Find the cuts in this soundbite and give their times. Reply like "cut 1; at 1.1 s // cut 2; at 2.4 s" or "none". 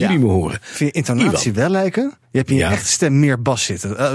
cut 1; at 2.2 s